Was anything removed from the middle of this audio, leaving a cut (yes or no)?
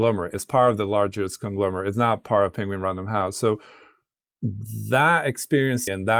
no